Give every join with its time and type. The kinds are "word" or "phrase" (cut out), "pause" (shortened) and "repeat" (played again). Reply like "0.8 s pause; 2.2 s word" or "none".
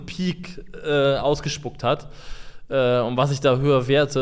none

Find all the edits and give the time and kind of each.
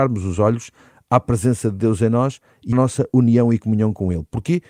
2.7 s word

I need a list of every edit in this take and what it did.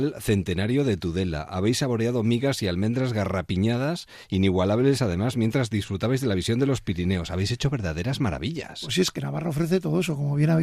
none

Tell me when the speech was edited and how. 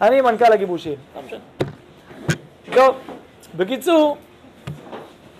none

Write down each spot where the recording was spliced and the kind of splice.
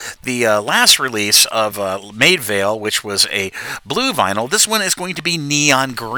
none

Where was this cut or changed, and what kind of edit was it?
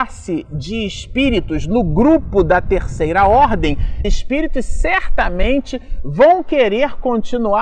4.0 s word

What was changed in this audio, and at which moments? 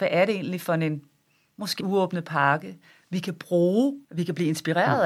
1.8 s word; 4.0 s pause

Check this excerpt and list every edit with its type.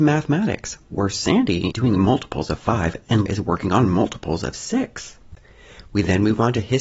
1.7 s word; 3.3 s word

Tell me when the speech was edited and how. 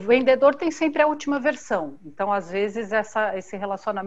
none

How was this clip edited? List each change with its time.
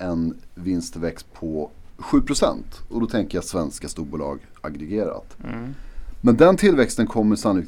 none

